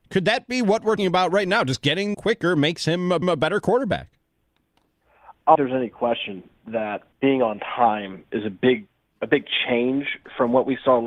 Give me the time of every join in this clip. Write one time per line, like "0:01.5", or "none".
0:01.0
0:02.1
0:03.2
0:05.6
0:07.1
0:08.3